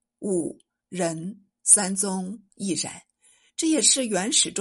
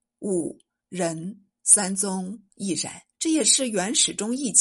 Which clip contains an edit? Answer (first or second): second